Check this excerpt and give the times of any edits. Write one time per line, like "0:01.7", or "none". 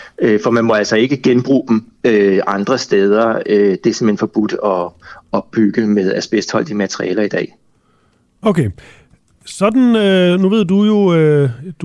none